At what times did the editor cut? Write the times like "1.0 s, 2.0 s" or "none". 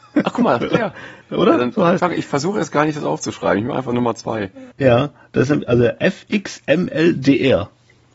1.2 s, 2.0 s, 4.7 s